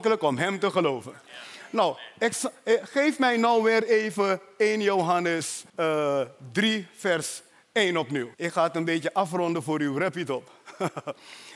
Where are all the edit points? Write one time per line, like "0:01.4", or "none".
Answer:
0:05.7
0:08.3